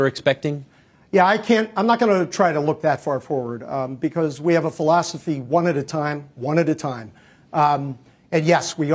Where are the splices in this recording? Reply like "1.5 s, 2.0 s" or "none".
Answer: none